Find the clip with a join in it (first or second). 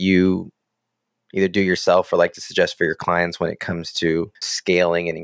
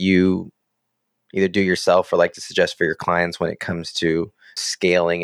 first